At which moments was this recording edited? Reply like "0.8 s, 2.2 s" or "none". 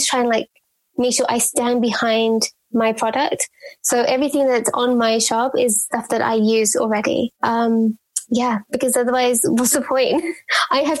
7.3 s